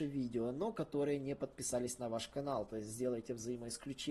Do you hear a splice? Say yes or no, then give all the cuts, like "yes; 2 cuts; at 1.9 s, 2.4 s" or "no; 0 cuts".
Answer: no; 0 cuts